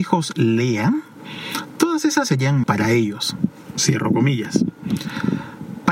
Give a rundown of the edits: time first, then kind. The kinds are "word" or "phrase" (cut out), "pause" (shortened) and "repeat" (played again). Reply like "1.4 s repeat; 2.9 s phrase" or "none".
2.3 s word; 2.6 s word